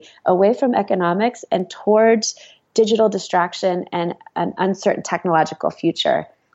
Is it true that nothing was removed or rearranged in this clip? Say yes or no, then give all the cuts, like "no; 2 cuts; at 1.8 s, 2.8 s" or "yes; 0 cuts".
yes; 0 cuts